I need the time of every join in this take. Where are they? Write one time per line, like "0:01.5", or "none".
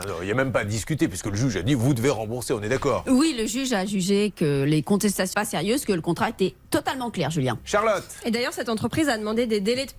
0:05.3